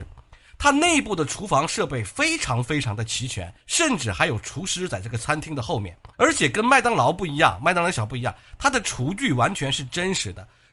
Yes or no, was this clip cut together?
yes